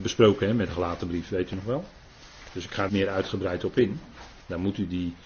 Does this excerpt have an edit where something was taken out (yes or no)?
yes